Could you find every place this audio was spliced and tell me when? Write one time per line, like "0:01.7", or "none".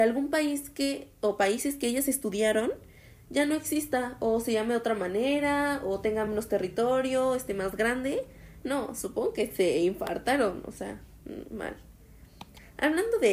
none